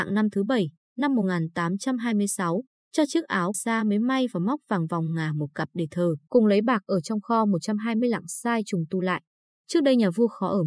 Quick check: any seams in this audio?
yes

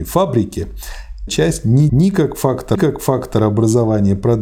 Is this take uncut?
no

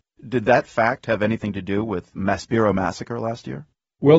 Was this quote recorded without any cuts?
no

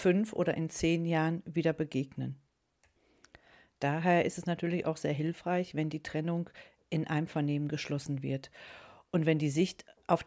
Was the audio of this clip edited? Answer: no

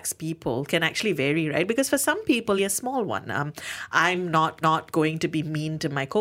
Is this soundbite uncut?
no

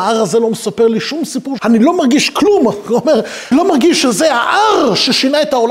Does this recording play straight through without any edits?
no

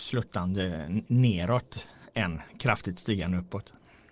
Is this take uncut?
yes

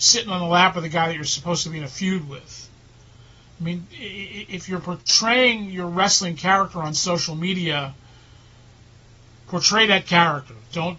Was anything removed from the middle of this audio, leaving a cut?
no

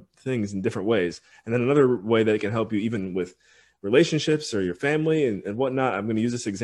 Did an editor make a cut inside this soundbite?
no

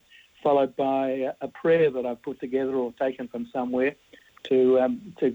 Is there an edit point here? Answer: no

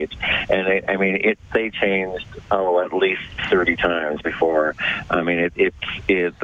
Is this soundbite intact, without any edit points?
yes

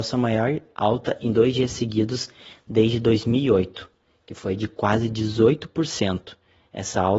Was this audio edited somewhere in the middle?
no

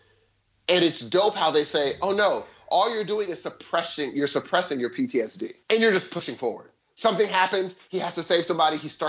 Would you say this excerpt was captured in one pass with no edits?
no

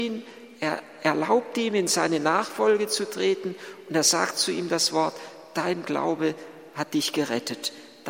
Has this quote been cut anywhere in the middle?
no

